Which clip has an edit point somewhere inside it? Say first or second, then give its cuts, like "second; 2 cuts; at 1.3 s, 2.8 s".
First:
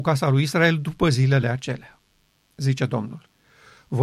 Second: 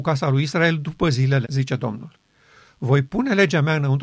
second; 1 cut; at 1.4 s